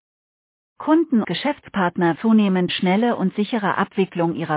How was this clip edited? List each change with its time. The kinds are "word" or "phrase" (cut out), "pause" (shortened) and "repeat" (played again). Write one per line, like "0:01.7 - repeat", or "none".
0:01.2 - word
0:02.2 - word
0:02.7 - word